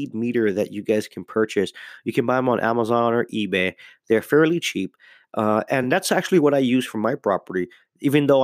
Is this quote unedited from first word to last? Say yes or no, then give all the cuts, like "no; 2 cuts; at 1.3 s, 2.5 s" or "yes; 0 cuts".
yes; 0 cuts